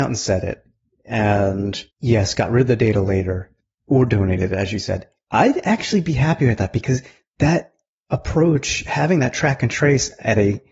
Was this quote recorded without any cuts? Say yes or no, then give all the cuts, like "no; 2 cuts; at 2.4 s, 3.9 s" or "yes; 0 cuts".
no; 2 cuts; at 1.9 s, 3.6 s